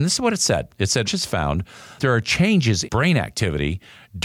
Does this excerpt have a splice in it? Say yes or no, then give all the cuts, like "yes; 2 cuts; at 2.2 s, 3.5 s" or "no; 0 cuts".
yes; 3 cuts; at 1.1 s, 2.0 s, 2.8 s